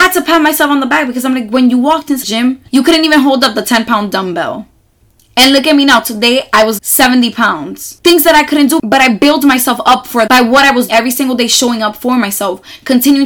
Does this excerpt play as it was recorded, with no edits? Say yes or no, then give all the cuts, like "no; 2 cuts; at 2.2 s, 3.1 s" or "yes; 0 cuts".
no; 5 cuts; at 2.2 s, 2.7 s, 6.8 s, 10.3 s, 10.9 s